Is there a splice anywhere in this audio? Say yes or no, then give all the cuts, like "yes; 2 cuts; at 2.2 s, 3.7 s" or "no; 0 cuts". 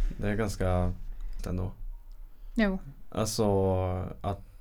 yes; 1 cut; at 1.4 s